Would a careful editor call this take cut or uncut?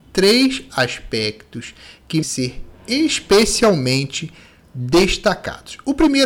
cut